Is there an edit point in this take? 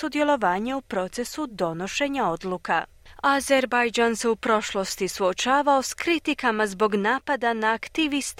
no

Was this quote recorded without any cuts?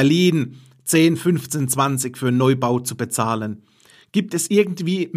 yes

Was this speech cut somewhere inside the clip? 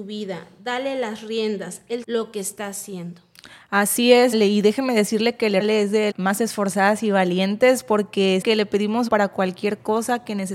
yes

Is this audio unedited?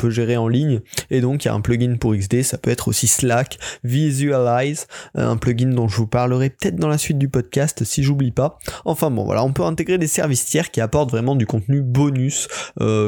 yes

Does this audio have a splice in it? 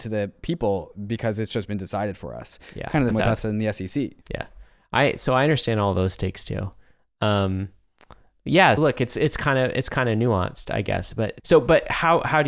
yes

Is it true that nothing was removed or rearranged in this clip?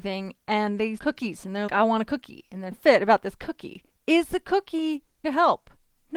no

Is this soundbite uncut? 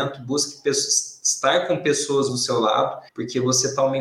no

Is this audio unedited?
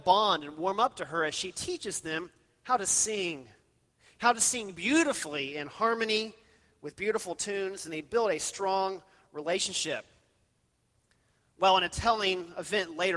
yes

